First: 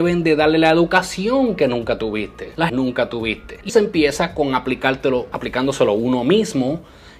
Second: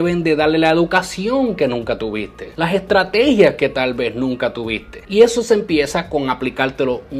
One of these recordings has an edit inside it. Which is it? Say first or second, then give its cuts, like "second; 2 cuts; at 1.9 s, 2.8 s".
first; 3 cuts; at 2.7 s, 3.7 s, 5.3 s